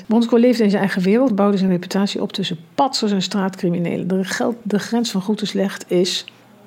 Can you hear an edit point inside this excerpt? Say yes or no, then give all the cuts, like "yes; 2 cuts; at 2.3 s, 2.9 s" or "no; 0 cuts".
no; 0 cuts